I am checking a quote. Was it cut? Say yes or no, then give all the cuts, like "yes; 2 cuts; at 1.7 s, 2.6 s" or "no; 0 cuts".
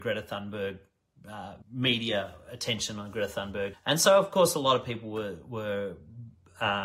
yes; 2 cuts; at 1.6 s, 3.7 s